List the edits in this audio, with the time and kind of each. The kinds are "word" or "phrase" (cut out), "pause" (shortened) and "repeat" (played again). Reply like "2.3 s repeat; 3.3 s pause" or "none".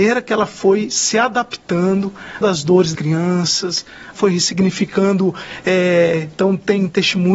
2.4 s word; 2.9 s word; 4.2 s phrase